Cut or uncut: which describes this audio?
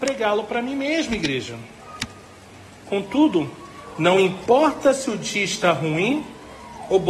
uncut